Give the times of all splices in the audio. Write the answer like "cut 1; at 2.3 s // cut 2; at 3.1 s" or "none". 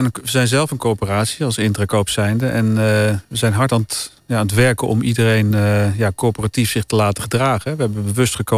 none